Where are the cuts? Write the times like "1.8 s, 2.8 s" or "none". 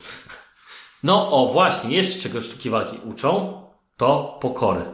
none